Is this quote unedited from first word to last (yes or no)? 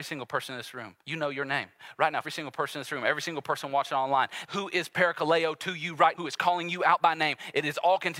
no